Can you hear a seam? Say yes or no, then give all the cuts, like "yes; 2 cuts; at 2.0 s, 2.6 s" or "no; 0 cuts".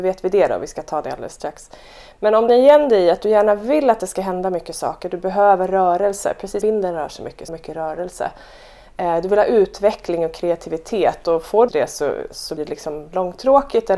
yes; 5 cuts; at 2.5 s, 6.6 s, 7.5 s, 11.7 s, 12.6 s